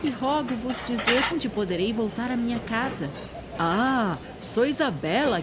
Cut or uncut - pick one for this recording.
cut